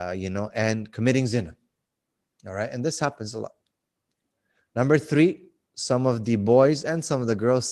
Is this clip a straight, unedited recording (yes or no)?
yes